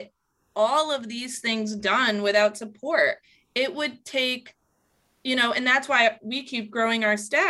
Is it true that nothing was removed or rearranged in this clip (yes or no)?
yes